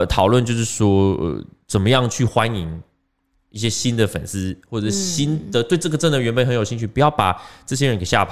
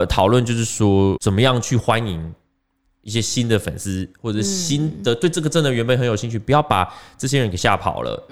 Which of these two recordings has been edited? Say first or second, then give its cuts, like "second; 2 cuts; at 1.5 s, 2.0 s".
second; 1 cut; at 1.2 s